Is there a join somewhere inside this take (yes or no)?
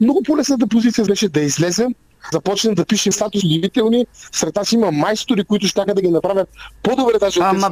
yes